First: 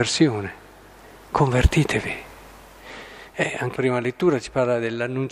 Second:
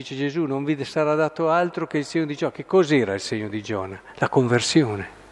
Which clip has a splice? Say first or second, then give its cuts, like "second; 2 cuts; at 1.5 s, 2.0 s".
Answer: first; 1 cut; at 3.8 s